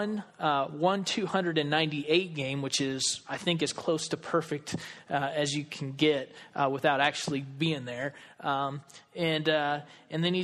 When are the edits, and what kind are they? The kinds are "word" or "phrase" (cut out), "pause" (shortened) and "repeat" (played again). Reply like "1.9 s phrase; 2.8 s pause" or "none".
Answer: none